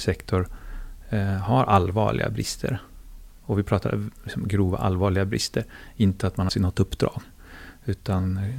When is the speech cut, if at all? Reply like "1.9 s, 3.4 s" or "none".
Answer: 6.5 s